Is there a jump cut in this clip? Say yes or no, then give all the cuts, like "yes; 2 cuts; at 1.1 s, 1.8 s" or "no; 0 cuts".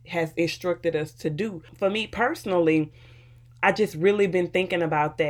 no; 0 cuts